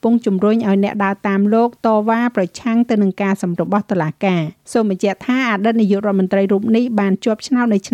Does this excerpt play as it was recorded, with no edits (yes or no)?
no